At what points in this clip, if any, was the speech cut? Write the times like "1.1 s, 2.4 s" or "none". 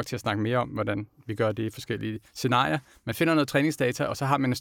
2.3 s